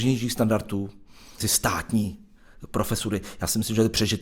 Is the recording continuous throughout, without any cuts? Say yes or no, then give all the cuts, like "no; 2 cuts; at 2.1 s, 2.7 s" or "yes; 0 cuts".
no; 1 cut; at 1.4 s